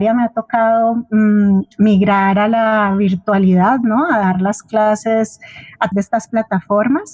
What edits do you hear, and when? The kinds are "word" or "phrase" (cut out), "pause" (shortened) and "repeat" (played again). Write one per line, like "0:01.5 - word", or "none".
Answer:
0:05.9 - word